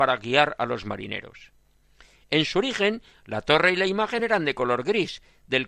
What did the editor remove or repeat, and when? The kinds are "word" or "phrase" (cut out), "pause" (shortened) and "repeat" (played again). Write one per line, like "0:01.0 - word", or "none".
none